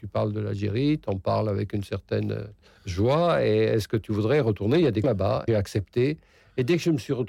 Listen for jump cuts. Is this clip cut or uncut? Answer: cut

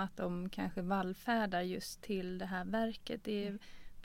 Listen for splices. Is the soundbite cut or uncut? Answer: uncut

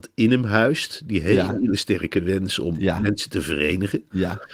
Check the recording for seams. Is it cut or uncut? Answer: uncut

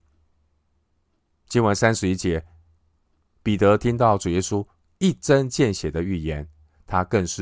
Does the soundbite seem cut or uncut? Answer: uncut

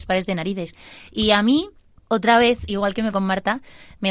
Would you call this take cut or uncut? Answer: cut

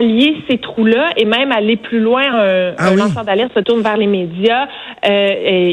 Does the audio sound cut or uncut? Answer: cut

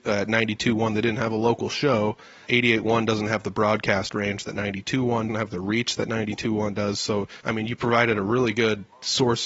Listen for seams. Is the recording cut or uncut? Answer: cut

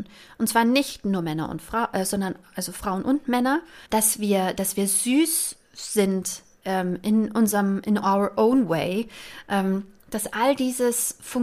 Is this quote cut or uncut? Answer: cut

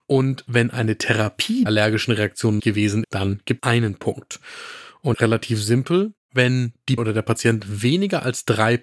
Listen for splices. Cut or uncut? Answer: cut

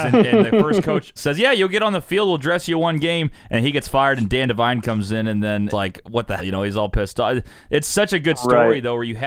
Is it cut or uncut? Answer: cut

